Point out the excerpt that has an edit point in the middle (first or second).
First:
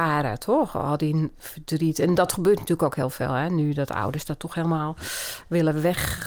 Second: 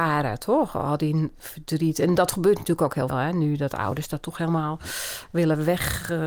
second